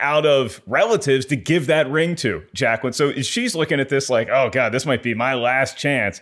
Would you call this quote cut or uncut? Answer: uncut